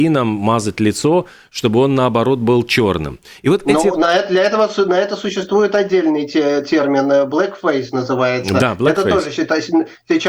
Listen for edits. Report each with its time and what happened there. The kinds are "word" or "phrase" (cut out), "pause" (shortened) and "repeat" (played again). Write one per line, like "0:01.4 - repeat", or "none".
none